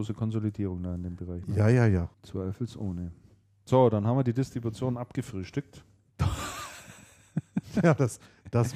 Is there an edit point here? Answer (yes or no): yes